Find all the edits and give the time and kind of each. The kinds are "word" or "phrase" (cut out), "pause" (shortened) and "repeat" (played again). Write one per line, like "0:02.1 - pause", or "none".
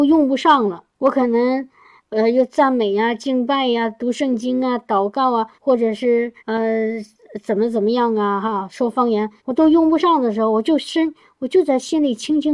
0:00.9 - word
0:05.5 - pause
0:06.4 - pause
0:09.4 - pause